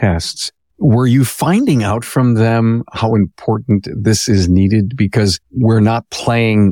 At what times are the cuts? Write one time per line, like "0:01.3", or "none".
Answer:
0:05.4